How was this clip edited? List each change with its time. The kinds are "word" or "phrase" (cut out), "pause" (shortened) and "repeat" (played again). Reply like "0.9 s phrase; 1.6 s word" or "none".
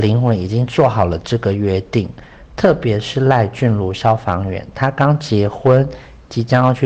none